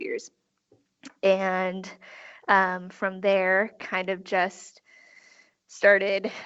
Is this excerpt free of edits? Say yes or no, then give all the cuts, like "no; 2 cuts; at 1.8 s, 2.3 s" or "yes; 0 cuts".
yes; 0 cuts